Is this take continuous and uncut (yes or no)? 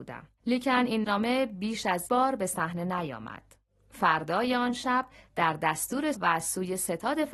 no